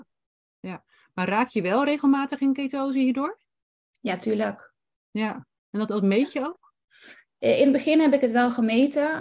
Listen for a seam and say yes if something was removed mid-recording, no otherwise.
no